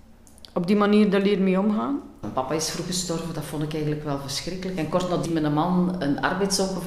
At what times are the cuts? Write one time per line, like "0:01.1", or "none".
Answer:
0:05.3